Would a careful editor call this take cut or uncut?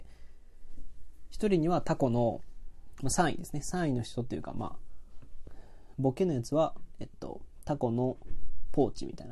uncut